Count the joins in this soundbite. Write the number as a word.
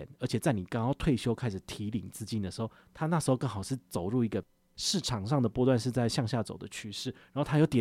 zero